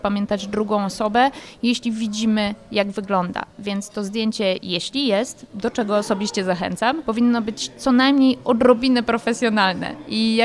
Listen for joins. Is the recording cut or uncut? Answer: uncut